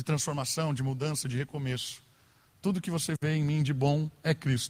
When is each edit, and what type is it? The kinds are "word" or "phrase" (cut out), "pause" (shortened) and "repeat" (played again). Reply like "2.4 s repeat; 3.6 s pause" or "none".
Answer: none